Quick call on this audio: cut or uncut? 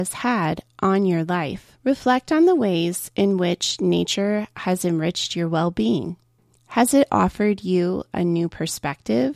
cut